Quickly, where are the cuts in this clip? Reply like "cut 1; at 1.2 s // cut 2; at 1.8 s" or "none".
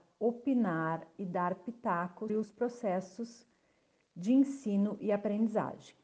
cut 1; at 1.1 s // cut 2; at 2.3 s